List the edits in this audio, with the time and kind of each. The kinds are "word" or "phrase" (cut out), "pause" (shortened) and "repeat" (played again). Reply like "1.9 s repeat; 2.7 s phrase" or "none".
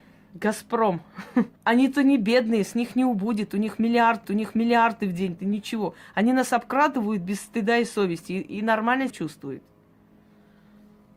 1.6 s pause; 4.2 s repeat; 5.4 s word; 9.1 s word